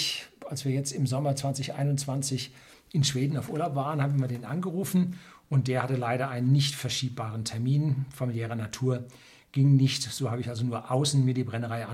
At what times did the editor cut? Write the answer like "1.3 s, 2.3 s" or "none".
none